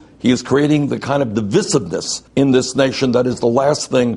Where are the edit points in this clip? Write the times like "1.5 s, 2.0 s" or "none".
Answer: 2.3 s